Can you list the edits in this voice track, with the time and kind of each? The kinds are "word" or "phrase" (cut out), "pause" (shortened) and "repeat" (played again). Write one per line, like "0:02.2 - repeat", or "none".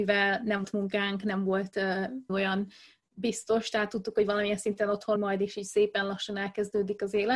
0:02.3 - word
0:05.2 - word

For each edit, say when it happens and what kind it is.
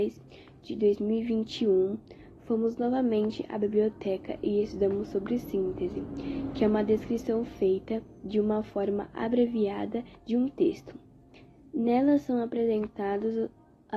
0:10.2 - pause

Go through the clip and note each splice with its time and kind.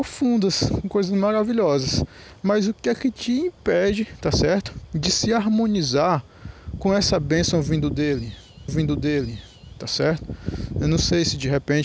0:08.7 - repeat

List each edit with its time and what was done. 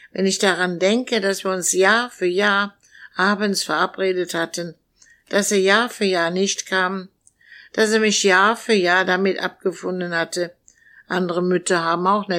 none

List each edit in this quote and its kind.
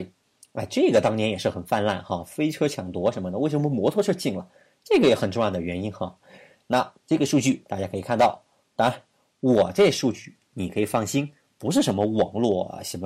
none

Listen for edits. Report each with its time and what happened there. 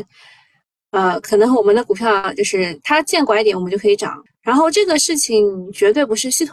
0:04.3 - pause

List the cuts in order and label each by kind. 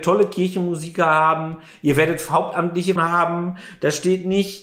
0:03.0 - word

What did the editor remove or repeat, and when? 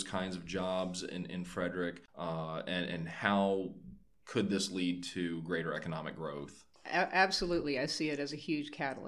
0:02.1 - pause
0:06.8 - pause

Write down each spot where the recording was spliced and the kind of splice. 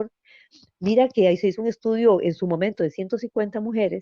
none

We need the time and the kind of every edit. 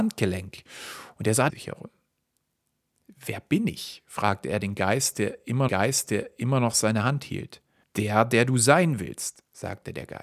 0:01.5 - phrase
0:05.7 - repeat
0:07.8 - pause

